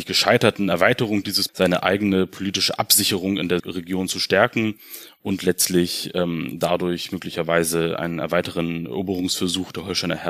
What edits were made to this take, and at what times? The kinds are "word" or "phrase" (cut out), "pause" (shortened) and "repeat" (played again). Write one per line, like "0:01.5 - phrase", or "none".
0:01.5 - word
0:03.6 - word